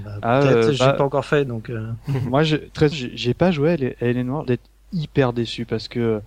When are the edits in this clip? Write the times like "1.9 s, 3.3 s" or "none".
2.9 s, 4.5 s